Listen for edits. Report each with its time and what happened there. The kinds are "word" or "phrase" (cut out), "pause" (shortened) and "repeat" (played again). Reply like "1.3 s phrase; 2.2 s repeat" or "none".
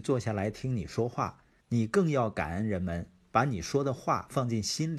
1.6 s pause